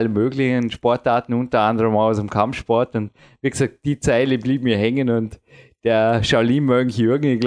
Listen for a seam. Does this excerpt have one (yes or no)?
no